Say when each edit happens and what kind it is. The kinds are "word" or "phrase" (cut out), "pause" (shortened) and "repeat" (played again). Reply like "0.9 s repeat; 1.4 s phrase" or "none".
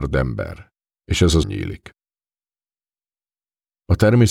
1.4 s phrase

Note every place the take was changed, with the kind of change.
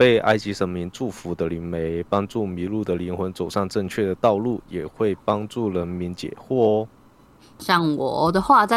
none

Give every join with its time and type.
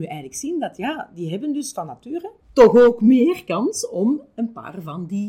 2.4 s pause

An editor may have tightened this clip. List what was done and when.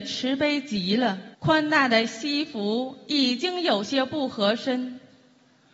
1.3 s pause

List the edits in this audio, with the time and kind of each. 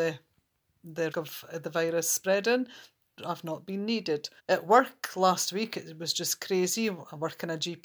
1.1 s word; 3.2 s word; 4.4 s pause

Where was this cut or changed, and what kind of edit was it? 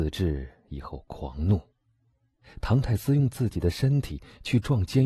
none

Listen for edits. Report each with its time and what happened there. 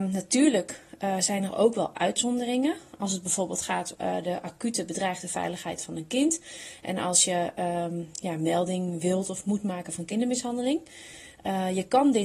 3.9 s word

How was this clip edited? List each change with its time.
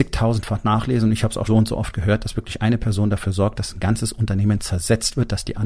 1.4 s word

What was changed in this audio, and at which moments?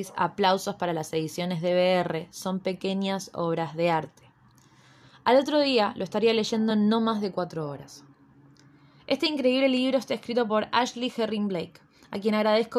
none

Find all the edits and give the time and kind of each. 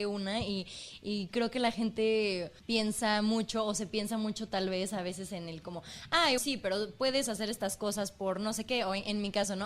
2.6 s pause; 6.4 s word

